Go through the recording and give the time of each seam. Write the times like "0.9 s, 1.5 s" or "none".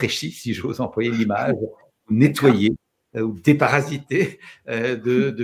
none